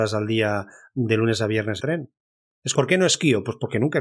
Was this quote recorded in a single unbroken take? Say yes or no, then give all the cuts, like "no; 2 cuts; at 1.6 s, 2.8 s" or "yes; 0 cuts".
no; 2 cuts; at 1.8 s, 2.7 s